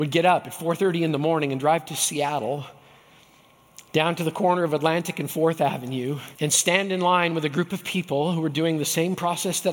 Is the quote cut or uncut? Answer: cut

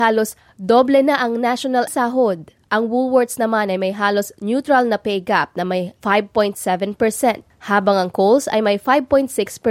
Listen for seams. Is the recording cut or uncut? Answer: cut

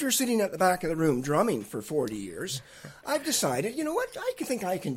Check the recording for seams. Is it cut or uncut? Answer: uncut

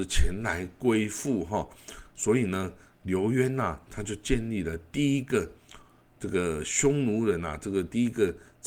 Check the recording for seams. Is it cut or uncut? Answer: uncut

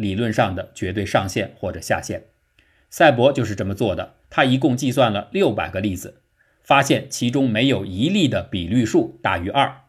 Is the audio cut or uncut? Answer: cut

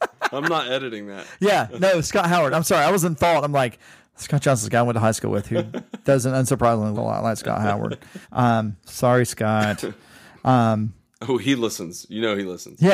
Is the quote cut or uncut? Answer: cut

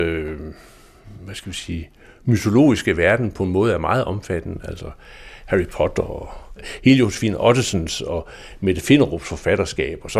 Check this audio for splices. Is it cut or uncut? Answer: uncut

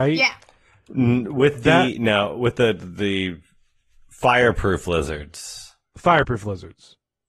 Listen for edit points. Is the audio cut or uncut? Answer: uncut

